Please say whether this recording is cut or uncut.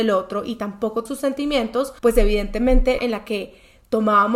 cut